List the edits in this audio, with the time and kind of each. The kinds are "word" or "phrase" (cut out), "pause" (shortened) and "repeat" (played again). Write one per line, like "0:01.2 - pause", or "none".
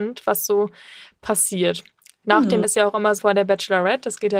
0:02.6 - word
0:03.2 - phrase